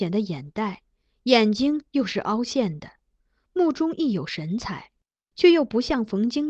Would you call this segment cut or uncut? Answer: uncut